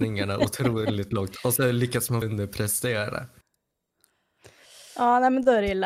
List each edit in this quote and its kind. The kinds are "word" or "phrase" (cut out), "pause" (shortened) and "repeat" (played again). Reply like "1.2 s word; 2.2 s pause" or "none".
2.2 s word